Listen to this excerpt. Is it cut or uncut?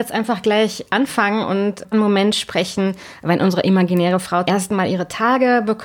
cut